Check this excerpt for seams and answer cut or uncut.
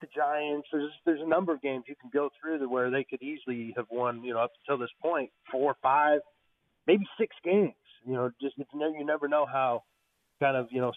uncut